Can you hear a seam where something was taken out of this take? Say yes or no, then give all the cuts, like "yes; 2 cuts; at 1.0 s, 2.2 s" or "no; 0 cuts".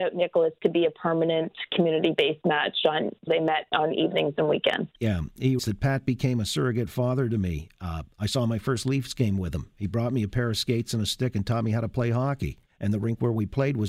yes; 5 cuts; at 3.3 s, 5.0 s, 5.6 s, 8.1 s, 12.7 s